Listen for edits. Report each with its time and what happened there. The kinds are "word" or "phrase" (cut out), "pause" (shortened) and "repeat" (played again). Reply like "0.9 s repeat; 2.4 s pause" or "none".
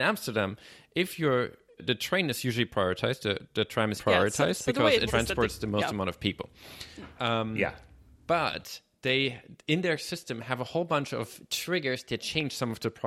1.8 s word; 3.4 s word; 4.0 s word; 5.1 s word